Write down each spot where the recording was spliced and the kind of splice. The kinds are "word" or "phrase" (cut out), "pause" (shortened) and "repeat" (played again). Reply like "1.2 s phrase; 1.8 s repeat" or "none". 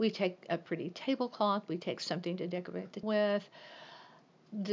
3.0 s word